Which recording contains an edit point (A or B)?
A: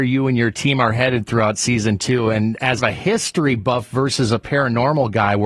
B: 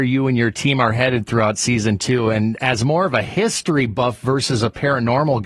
A